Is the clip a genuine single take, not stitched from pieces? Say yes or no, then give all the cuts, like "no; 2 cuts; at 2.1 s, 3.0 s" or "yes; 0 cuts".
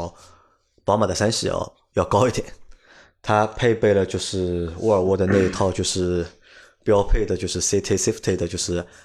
yes; 0 cuts